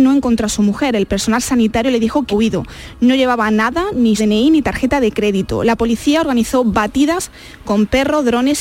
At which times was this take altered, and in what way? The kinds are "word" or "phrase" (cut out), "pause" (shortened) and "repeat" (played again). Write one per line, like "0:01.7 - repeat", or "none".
0:02.3 - word
0:04.2 - word